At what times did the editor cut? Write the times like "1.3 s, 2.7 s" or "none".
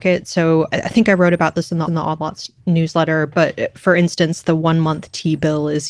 1.9 s